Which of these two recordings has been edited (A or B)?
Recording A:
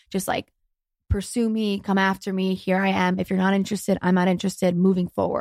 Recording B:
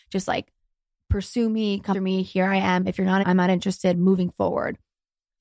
B